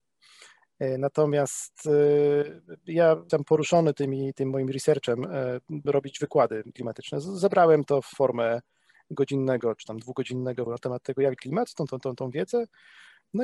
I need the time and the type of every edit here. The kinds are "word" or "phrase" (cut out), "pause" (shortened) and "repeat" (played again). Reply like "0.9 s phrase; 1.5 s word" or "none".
3.3 s word; 5.9 s word; 6.7 s word; 8.1 s word; 10.7 s word; 11.4 s word; 11.9 s word